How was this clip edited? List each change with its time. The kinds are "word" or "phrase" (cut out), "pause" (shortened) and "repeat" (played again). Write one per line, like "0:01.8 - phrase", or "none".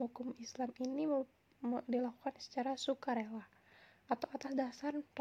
none